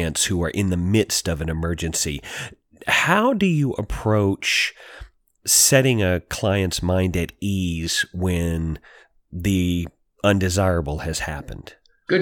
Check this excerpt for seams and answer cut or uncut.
uncut